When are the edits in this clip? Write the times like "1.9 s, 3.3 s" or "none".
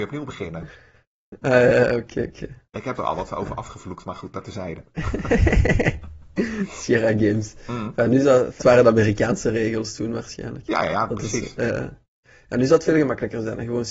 8.6 s